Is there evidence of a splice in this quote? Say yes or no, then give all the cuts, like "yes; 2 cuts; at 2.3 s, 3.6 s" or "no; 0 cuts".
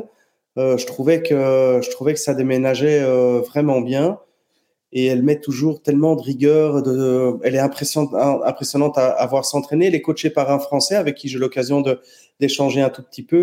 no; 0 cuts